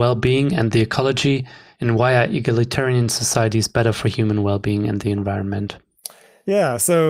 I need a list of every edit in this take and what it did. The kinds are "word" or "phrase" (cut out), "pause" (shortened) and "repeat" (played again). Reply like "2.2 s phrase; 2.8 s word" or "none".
none